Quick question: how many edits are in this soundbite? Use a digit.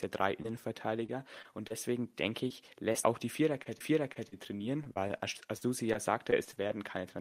2